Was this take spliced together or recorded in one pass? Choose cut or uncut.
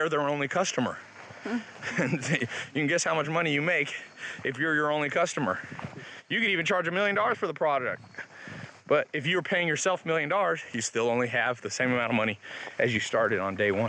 uncut